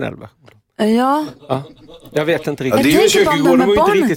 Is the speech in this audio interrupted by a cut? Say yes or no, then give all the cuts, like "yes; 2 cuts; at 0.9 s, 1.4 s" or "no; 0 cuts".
no; 0 cuts